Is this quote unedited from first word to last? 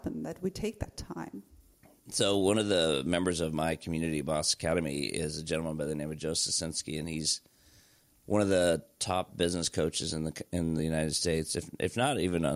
yes; 0 cuts

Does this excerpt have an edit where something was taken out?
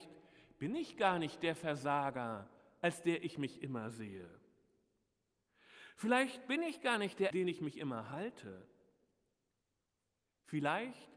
yes; 1 cut; at 7.3 s

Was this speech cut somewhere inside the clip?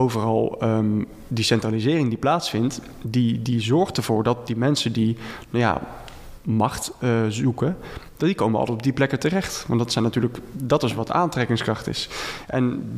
no; 0 cuts

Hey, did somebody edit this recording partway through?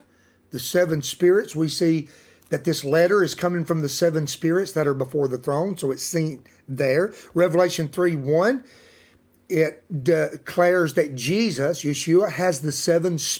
no; 0 cuts

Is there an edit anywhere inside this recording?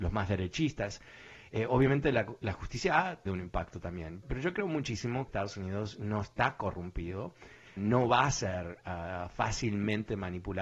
yes; 4 cuts; at 3.3 s, 4.2 s, 5.3 s, 7.8 s

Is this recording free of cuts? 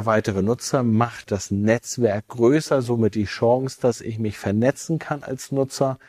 no; 1 cut; at 1.2 s

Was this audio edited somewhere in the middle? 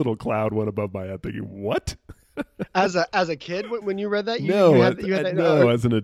yes; 1 cut; at 3.8 s

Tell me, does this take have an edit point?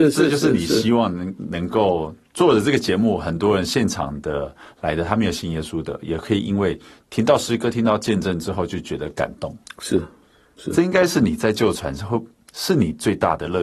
no; 0 cuts

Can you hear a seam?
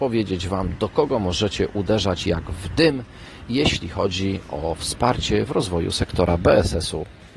no; 0 cuts

